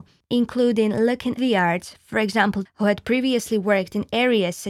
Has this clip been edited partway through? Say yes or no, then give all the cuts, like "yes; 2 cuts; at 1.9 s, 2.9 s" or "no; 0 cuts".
yes; 2 cuts; at 1.4 s, 2.7 s